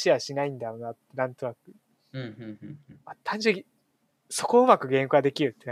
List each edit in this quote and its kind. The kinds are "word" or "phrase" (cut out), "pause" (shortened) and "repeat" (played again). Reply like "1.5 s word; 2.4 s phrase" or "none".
none